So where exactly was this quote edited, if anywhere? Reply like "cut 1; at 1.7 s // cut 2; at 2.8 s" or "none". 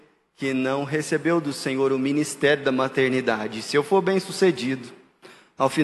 none